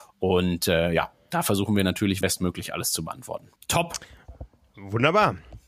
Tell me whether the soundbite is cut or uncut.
cut